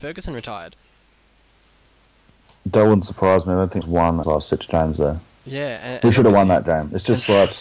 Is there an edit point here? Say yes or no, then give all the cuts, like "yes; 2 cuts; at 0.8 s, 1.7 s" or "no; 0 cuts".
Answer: yes; 2 cuts; at 3.8 s, 4.2 s